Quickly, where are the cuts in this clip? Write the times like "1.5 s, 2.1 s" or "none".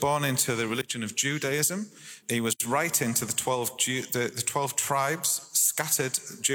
2.2 s